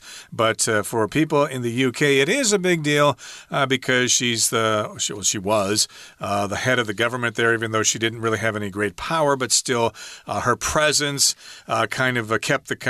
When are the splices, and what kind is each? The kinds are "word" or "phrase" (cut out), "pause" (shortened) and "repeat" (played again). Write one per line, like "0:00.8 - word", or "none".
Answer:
none